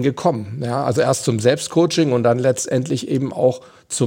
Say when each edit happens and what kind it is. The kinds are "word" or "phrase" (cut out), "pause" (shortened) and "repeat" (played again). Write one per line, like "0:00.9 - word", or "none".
none